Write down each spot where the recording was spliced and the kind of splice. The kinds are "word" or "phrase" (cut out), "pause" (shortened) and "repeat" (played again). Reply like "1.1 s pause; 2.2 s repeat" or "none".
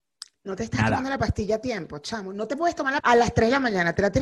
3.0 s word